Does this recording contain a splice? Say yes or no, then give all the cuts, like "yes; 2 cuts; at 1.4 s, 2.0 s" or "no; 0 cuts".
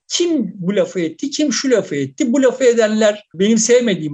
no; 0 cuts